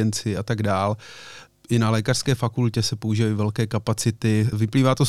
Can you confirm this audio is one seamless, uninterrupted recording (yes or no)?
yes